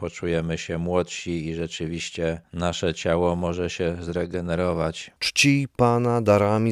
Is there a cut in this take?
yes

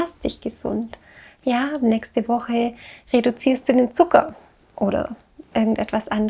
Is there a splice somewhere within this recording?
no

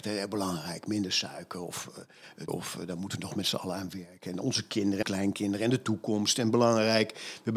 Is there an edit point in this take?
yes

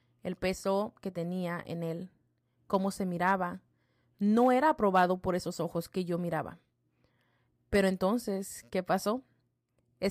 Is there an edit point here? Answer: no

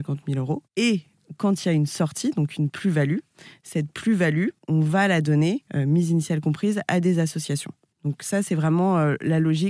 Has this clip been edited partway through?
yes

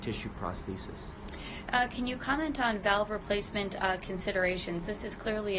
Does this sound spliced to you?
no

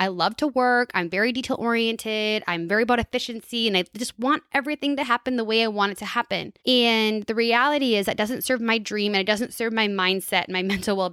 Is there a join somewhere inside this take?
yes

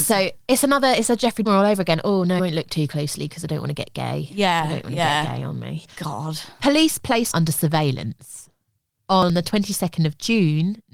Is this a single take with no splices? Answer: no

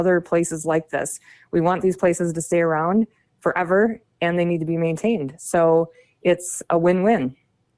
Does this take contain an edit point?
no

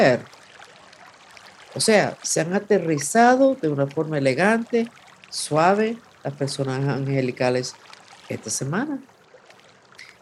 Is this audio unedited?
yes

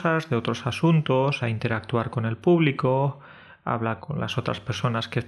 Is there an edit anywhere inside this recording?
yes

